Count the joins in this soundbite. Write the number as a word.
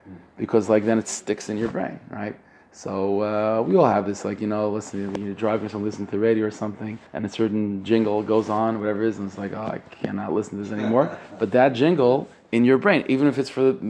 one